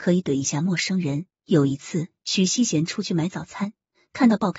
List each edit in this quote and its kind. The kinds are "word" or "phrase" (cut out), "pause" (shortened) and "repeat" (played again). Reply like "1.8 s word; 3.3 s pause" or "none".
1.3 s pause